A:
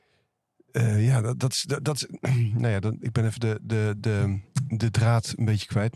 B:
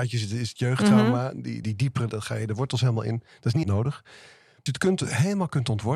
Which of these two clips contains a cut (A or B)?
B